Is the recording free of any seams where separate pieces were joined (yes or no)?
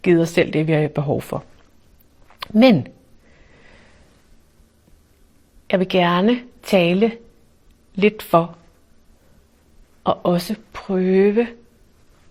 yes